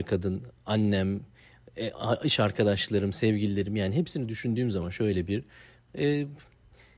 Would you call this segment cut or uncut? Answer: uncut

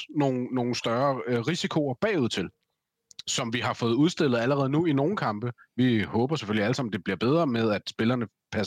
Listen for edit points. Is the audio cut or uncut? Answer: uncut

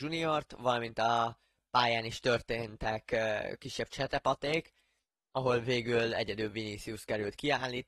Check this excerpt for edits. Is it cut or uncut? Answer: uncut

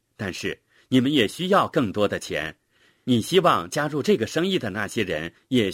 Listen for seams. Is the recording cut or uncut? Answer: uncut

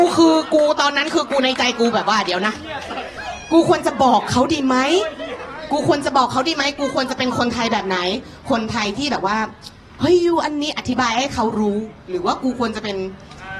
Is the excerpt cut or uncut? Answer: uncut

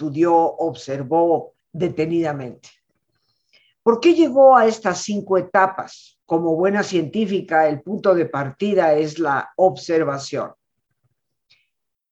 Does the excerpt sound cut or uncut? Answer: cut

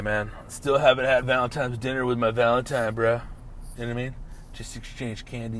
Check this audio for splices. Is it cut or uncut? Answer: cut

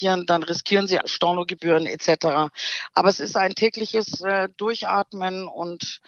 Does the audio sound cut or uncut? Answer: cut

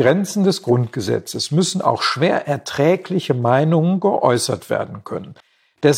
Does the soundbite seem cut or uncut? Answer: uncut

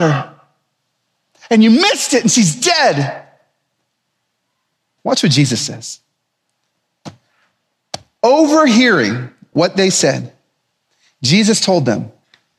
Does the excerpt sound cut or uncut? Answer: uncut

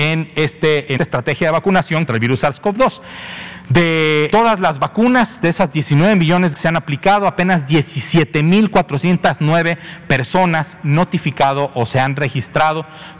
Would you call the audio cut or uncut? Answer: cut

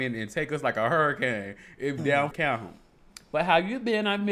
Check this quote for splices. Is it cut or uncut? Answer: cut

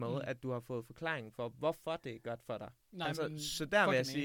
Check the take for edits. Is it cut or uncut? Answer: cut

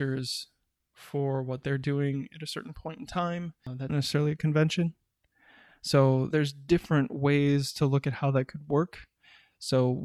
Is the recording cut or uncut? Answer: cut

